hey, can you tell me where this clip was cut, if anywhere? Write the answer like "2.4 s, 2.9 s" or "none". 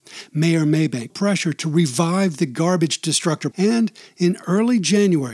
1.1 s, 3.5 s

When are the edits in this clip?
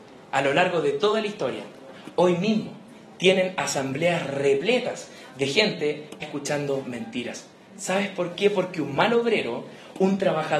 6.2 s

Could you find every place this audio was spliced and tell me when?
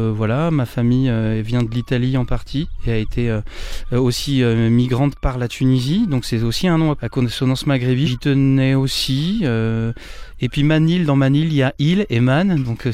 8.0 s

